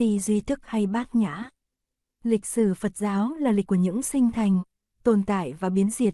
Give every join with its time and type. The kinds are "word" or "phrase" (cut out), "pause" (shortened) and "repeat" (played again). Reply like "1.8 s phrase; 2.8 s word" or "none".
3.6 s word